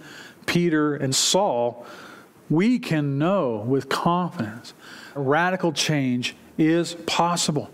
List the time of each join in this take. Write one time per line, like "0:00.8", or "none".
0:01.1
0:05.2